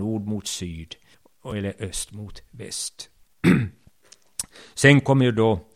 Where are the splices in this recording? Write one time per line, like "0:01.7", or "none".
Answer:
0:01.1